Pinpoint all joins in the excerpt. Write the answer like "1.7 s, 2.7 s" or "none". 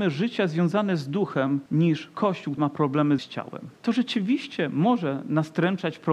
1.7 s, 2.6 s, 3.2 s, 3.8 s